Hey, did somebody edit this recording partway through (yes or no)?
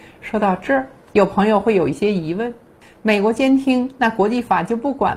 no